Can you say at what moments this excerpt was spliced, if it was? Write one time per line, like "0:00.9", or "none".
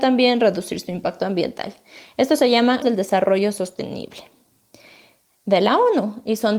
0:02.8

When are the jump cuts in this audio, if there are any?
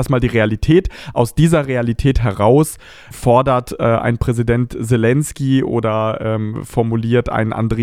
0:03.1

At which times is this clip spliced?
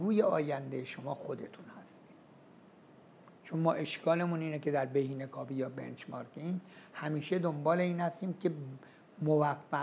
none

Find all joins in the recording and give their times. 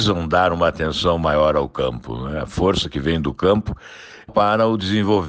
0:04.3

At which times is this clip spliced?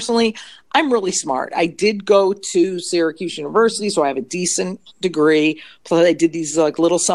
none

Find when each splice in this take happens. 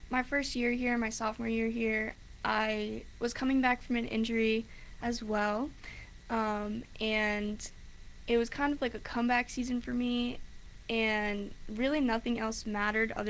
none

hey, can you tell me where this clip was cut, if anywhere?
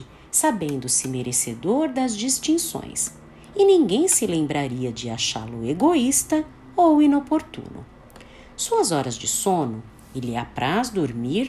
none

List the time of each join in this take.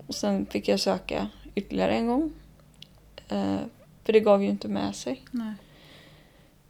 none

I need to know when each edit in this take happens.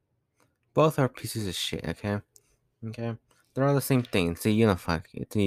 none

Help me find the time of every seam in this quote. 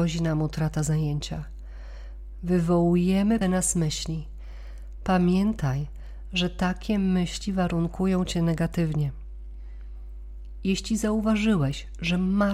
0:03.4

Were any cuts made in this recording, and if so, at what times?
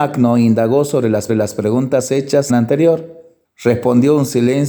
0:01.3
0:02.5
0:03.4

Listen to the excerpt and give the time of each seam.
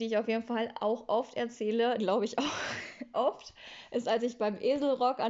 0:02.0
0:03.1

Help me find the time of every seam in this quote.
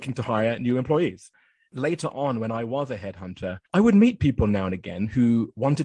0:03.7

